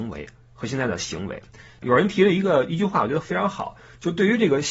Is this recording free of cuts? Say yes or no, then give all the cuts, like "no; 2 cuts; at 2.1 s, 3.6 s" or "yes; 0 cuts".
yes; 0 cuts